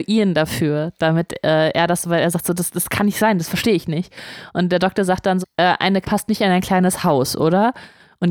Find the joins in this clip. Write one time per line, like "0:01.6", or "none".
0:05.4
0:06.0